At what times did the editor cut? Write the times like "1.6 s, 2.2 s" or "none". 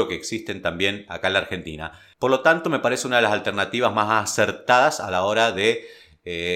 none